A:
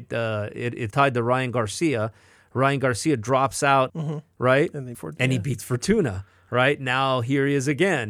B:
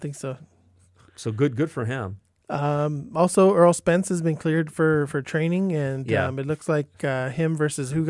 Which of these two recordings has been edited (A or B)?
A